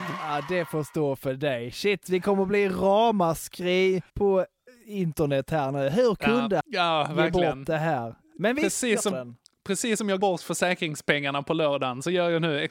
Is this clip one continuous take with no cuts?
no; 4 cuts; at 4.1 s, 6.6 s, 9.1 s, 10.2 s

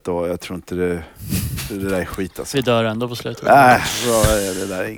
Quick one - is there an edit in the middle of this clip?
no; 0 cuts

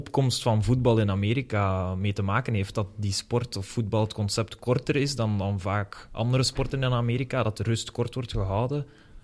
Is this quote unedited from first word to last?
yes; 0 cuts

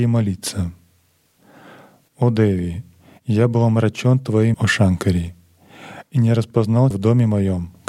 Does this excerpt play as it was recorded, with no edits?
no; 2 cuts; at 4.5 s, 6.9 s

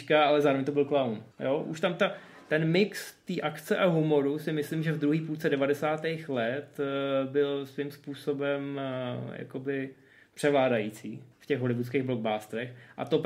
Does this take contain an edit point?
yes; 2 cuts; at 1.3 s, 11.3 s

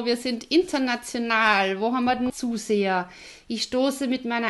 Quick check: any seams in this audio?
yes; 1 cut; at 2.3 s

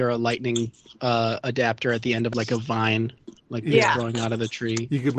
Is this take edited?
yes; 1 cut; at 3.4 s

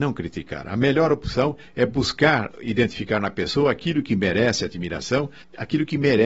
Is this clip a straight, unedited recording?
yes; 0 cuts

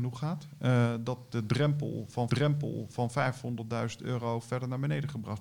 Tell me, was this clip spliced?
yes; 1 cut; at 2.3 s

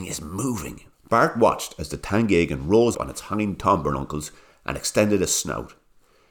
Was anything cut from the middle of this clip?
yes; 2 cuts; at 0.9 s, 2.9 s

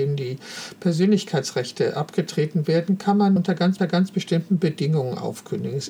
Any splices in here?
yes; 2 cuts; at 3.4 s, 3.8 s

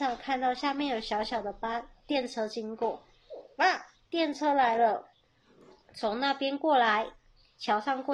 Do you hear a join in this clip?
no; 0 cuts

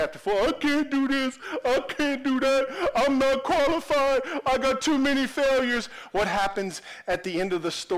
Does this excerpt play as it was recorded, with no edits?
yes; 0 cuts

